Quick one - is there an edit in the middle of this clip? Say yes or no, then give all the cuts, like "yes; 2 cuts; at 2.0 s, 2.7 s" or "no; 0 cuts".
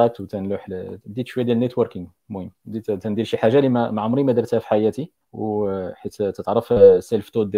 yes; 2 cuts; at 2.6 s, 5.2 s